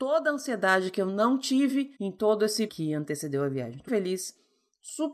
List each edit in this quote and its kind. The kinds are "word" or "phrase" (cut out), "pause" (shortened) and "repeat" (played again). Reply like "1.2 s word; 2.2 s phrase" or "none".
2.0 s pause; 2.7 s word; 3.9 s word